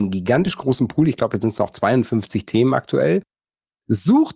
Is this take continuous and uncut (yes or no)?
yes